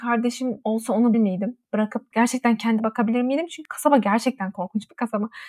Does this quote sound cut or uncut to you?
cut